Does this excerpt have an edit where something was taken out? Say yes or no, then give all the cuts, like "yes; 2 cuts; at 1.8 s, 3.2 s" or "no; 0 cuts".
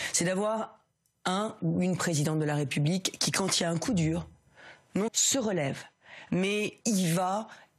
yes; 2 cuts; at 5.1 s, 6.8 s